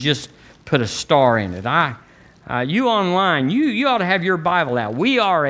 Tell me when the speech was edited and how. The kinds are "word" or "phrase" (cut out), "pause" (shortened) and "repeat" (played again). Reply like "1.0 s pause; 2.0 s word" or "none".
none

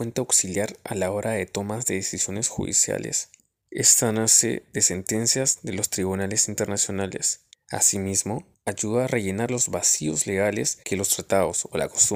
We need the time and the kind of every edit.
3.4 s pause; 7.5 s pause; 10.8 s pause

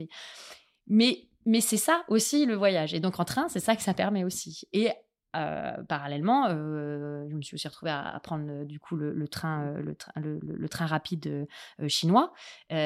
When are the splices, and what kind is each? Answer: none

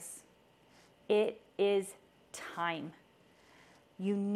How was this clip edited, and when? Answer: none

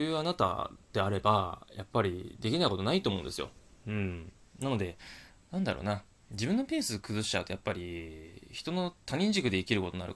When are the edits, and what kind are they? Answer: none

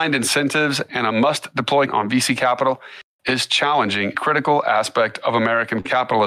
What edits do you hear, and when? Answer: 1.9 s word; 4.1 s word

